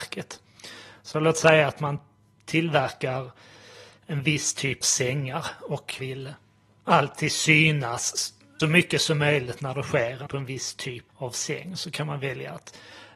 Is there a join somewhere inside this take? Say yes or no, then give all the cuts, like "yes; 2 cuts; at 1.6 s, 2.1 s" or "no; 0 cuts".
yes; 5 cuts; at 4.8 s, 6.0 s, 8.6 s, 10.3 s, 11.1 s